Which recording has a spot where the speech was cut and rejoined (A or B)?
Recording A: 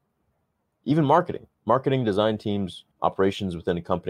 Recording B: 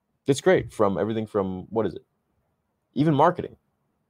A